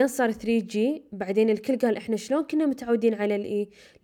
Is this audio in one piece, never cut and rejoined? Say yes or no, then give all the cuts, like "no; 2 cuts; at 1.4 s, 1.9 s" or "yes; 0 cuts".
yes; 0 cuts